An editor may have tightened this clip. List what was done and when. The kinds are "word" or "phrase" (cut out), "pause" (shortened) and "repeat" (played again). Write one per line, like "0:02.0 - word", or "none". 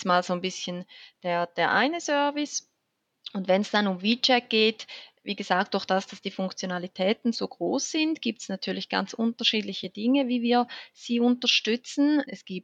0:07.3 - word